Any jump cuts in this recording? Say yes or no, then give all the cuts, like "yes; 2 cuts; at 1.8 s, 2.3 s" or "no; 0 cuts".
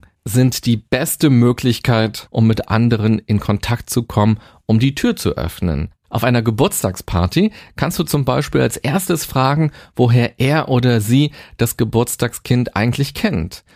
no; 0 cuts